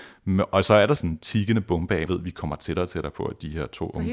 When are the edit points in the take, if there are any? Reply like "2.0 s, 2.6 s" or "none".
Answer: 1.0 s, 2.1 s